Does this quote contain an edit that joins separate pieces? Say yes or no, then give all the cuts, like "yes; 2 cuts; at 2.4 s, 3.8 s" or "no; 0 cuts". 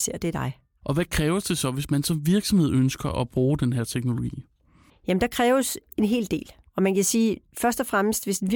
no; 0 cuts